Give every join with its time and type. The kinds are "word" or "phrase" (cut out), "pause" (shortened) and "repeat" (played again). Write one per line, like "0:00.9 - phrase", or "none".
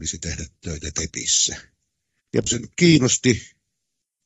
0:02.5 - word